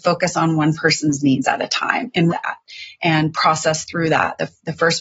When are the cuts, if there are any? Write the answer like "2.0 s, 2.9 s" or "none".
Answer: 2.3 s